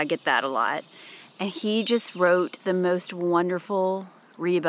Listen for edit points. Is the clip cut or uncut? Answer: uncut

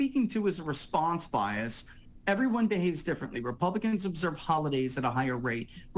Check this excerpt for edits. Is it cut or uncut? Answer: uncut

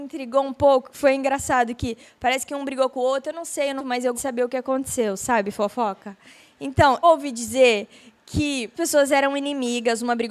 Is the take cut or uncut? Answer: cut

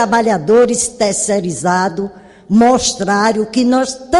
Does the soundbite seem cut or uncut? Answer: uncut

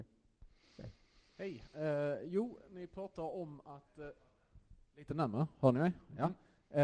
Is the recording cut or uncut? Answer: uncut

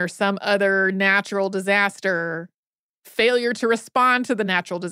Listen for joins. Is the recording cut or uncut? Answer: uncut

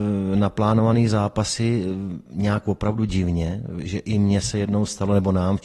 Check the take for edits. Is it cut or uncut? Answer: uncut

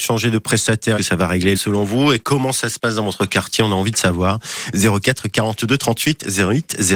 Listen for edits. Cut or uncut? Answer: cut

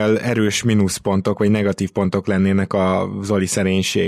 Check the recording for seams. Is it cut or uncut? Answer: uncut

